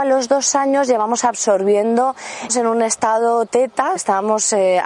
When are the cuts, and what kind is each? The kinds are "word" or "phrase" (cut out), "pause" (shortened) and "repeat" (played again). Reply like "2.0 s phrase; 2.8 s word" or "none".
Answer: 2.5 s word; 4.0 s word